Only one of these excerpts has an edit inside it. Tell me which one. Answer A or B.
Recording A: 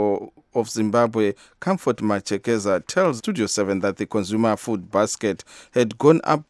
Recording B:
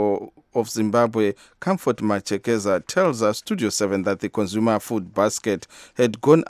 A